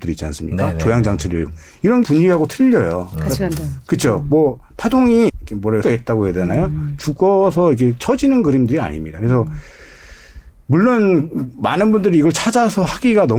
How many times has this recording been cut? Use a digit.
4